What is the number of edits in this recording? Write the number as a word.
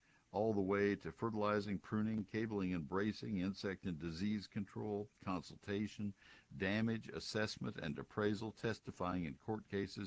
zero